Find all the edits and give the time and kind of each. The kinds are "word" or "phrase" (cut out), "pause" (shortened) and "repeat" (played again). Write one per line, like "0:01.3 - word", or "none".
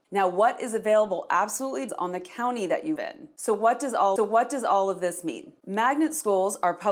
0:01.9 - word
0:03.0 - word
0:04.2 - repeat